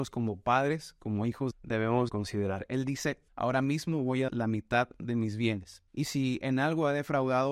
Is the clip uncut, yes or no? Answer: no